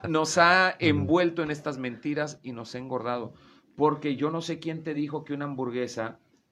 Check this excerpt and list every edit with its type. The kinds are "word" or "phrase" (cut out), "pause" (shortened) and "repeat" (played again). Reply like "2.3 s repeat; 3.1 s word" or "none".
none